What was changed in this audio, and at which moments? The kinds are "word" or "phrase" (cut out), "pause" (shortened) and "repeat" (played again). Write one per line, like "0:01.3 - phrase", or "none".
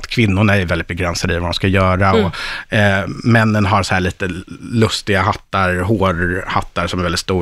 none